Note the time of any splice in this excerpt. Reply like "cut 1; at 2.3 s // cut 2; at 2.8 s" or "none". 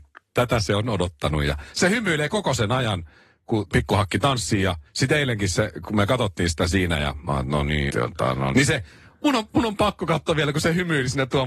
cut 1; at 3.7 s // cut 2; at 4.9 s // cut 3; at 7.9 s // cut 4; at 8.5 s